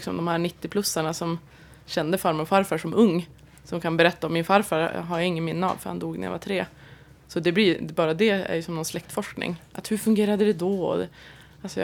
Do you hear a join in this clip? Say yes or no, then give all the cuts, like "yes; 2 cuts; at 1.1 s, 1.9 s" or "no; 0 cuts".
no; 0 cuts